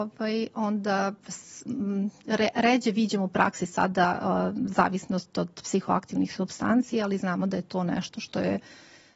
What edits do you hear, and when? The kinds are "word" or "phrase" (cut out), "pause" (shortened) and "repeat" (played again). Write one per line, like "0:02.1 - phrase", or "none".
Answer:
0:03.3 - word

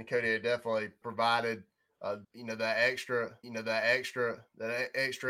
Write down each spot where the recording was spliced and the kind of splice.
0:01.0 - word
0:02.2 - pause
0:03.4 - repeat

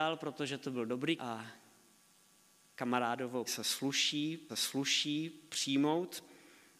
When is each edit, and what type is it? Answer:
0:01.2 - word
0:03.5 - word
0:04.5 - repeat

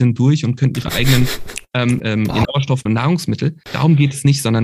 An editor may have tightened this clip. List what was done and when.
0:02.0 - word
0:02.4 - word
0:02.9 - word
0:03.6 - pause

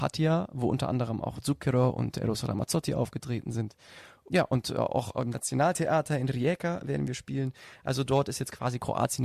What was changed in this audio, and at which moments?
none

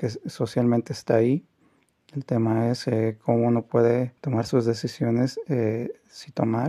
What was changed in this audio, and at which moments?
0:04.2 - pause

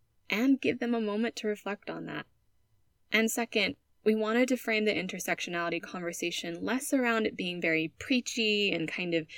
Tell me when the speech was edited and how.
none

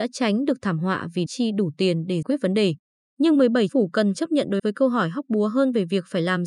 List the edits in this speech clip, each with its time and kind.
0:01.3 - word
0:02.2 - word
0:03.7 - word
0:04.1 - word
0:04.6 - word

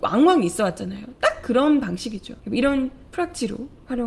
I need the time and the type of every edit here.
0:02.4 - pause

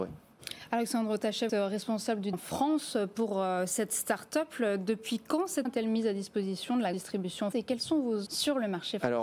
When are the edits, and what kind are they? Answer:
0:01.5 - phrase
0:02.3 - word
0:05.6 - word
0:06.9 - word
0:07.5 - word
0:08.3 - word

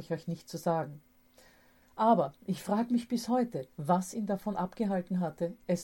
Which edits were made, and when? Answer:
none

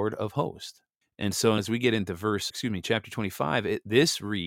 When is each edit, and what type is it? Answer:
0:01.0 - pause
0:01.6 - word
0:02.5 - word

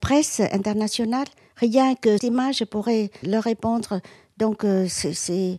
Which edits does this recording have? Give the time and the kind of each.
0:02.2 - word
0:03.2 - word

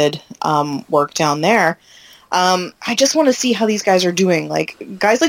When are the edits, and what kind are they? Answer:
0:02.8 - pause

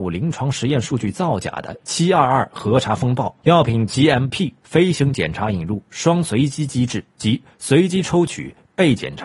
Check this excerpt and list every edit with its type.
0:03.4 - pause
0:07.1 - pause

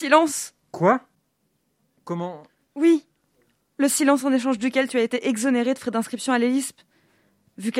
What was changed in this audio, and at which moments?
none

